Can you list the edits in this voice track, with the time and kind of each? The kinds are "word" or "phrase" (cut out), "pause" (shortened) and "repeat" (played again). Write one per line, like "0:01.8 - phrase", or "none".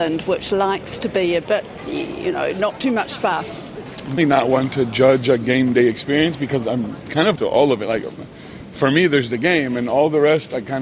0:04.2 - word
0:07.4 - word